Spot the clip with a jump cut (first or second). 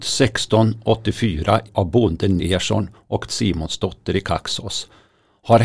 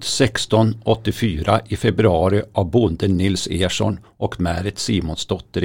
first